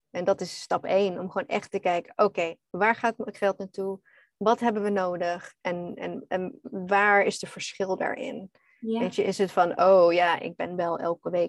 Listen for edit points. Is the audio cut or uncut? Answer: uncut